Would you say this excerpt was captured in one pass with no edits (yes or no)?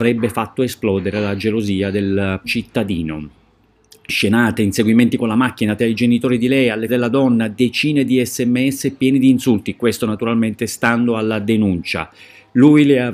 no